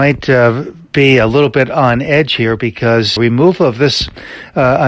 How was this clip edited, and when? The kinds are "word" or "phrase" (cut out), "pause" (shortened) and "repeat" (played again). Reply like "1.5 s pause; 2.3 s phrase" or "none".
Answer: 3.2 s word